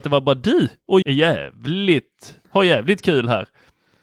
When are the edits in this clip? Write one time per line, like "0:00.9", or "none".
0:01.0
0:02.4

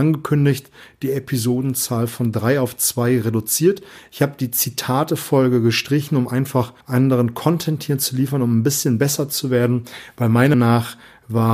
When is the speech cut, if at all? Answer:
0:06.8
0:10.5

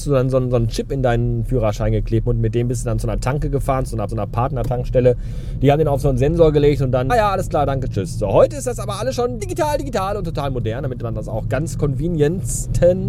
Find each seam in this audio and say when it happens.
0:02.3
0:04.1
0:07.1
0:09.4

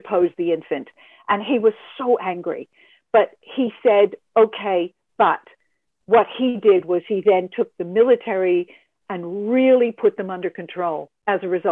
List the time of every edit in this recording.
none

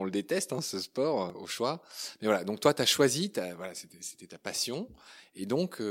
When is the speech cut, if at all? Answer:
none

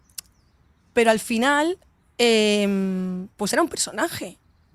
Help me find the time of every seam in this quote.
0:03.3

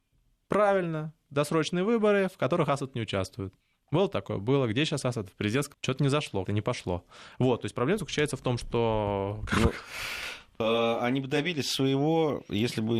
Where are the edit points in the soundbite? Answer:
0:03.6
0:05.7
0:06.4

